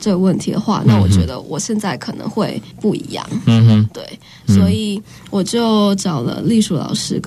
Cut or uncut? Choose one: uncut